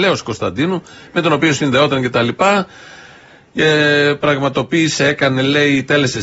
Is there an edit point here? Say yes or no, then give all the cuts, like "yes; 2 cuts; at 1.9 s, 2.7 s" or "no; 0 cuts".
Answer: no; 0 cuts